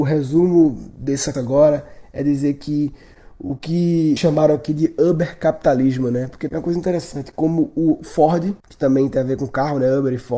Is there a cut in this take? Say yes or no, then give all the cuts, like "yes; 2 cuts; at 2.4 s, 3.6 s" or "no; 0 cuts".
yes; 4 cuts; at 1.3 s, 4.2 s, 6.5 s, 8.6 s